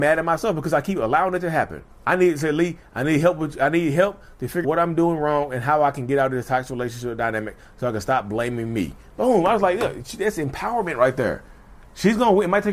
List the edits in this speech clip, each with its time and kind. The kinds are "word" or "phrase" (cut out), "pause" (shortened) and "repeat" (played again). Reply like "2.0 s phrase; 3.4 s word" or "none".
1.9 s pause; 4.6 s word